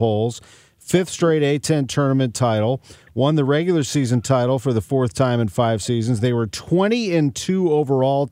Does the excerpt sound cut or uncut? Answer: uncut